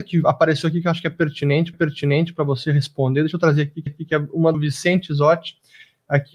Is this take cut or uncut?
cut